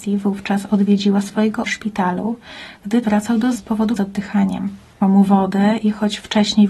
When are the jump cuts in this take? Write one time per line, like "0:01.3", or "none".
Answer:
0:01.6
0:03.0
0:03.5
0:04.0
0:05.0